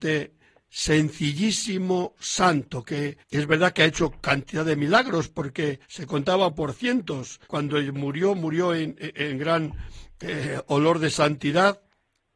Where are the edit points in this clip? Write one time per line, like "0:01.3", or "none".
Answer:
0:03.2
0:05.8
0:07.4